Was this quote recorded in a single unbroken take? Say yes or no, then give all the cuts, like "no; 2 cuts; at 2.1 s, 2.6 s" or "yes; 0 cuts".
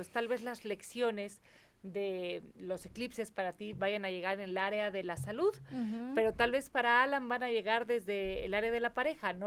yes; 0 cuts